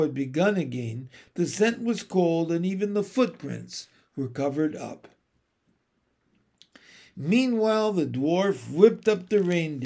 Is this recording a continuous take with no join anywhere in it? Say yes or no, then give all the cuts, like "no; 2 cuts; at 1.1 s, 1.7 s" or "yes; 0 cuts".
yes; 0 cuts